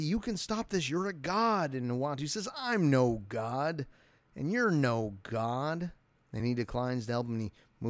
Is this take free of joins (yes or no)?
yes